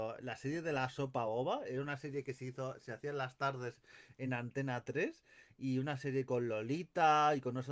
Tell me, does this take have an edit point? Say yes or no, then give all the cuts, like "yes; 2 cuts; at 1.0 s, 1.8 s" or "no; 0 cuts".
no; 0 cuts